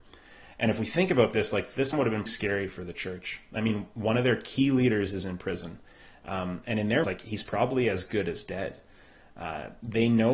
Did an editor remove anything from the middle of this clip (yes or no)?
yes